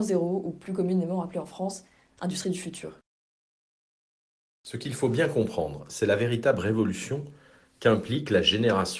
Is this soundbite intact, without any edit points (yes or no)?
yes